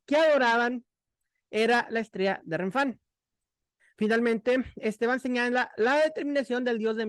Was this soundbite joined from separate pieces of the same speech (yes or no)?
no